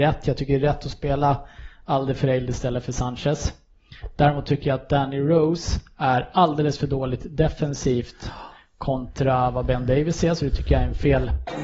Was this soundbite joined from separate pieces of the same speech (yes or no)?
no